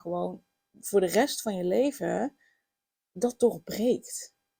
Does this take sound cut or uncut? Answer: uncut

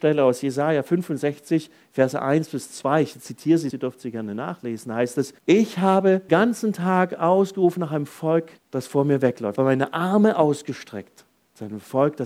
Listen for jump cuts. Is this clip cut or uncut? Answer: cut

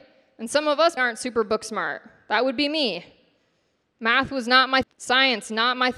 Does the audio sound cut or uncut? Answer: cut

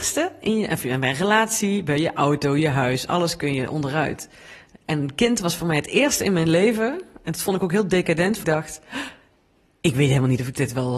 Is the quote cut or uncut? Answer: cut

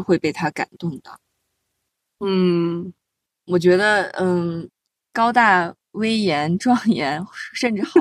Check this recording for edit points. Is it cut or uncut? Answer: uncut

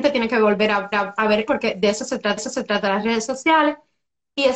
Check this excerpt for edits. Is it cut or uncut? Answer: cut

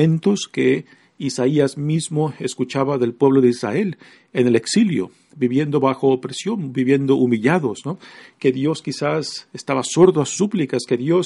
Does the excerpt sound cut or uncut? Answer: uncut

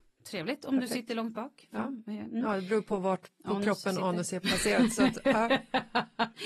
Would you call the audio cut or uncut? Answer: uncut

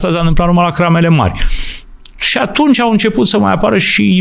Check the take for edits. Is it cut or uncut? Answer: uncut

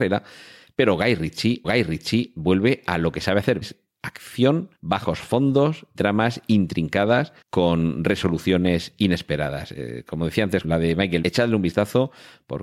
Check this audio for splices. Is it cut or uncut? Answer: cut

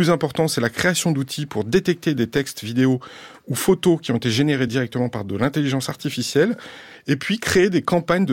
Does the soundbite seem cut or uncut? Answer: uncut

